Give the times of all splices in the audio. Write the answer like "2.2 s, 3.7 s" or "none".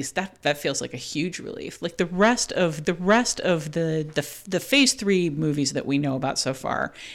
2.8 s